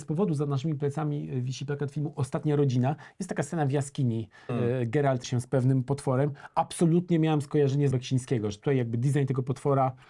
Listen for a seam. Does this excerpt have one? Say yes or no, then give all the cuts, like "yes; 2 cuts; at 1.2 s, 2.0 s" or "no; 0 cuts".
yes; 3 cuts; at 4.5 s, 5.2 s, 7.9 s